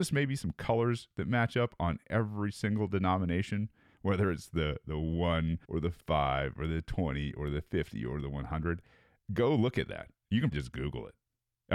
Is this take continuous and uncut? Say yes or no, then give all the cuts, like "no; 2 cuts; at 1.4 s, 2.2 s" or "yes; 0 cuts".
no; 2 cuts; at 5.6 s, 10.5 s